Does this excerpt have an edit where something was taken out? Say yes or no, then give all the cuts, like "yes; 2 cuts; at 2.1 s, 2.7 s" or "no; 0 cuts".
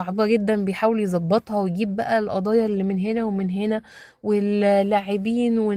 no; 0 cuts